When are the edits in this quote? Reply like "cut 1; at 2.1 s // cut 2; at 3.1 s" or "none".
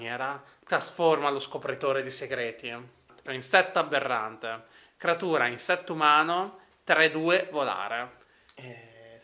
cut 1; at 3.3 s